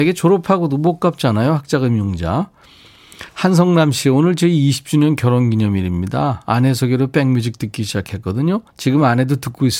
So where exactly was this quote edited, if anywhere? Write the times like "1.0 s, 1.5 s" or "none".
3.3 s, 8.7 s